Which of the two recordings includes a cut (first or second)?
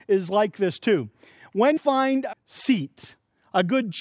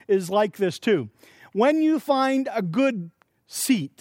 first